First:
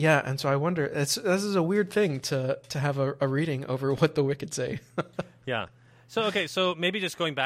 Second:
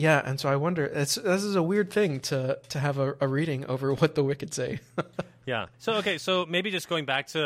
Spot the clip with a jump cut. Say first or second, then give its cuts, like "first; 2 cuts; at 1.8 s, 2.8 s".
second; 1 cut; at 5.7 s